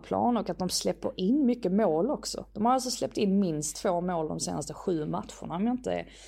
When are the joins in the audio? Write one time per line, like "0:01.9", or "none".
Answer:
none